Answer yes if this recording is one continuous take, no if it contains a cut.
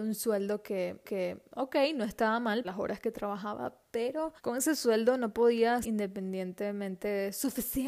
no